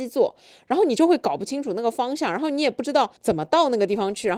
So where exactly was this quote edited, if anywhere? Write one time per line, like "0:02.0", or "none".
0:03.2